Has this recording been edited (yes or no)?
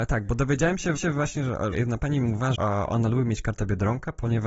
yes